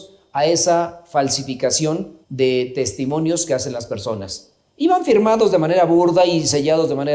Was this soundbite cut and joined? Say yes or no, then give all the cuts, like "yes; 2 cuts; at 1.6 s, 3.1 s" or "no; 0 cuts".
yes; 1 cut; at 2.2 s